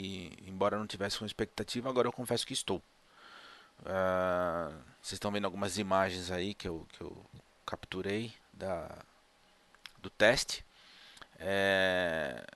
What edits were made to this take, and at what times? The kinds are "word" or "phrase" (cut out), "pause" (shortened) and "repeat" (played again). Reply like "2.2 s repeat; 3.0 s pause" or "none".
none

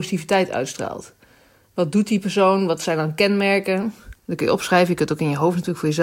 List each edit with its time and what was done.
4.2 s pause

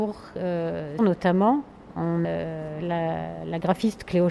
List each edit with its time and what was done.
1.0 s phrase; 2.2 s word

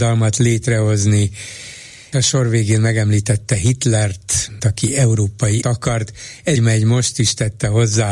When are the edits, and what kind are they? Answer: 2.1 s word; 4.6 s word; 5.6 s word; 6.6 s word

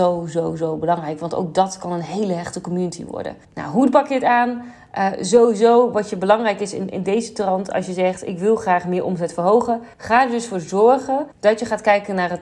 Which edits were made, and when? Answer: 3.4 s pause; 9.9 s pause; 11.3 s pause

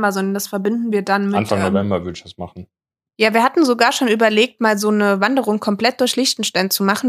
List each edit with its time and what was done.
none

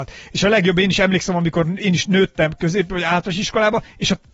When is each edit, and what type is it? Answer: none

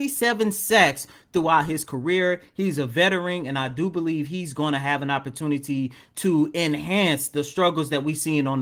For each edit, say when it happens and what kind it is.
none

